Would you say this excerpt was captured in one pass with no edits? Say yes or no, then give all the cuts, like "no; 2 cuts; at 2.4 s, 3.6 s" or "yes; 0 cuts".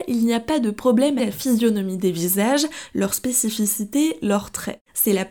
no; 1 cut; at 1.2 s